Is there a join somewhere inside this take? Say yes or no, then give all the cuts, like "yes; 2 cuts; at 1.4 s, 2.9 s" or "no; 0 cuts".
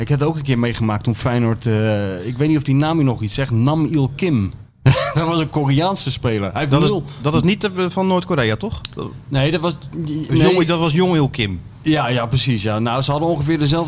yes; 1 cut; at 4.7 s